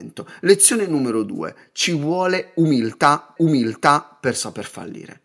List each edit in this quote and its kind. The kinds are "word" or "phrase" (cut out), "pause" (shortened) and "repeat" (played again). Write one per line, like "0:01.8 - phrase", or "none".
0:03.4 - repeat